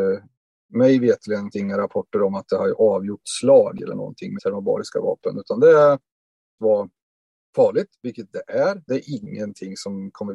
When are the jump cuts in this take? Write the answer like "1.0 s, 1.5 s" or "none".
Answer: 1.5 s, 3.2 s, 4.4 s, 6.6 s, 8.9 s

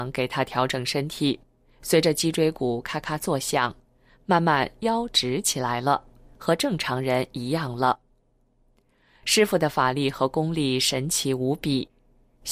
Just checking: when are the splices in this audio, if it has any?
none

